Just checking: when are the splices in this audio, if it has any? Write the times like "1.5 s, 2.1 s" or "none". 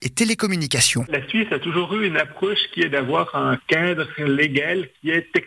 none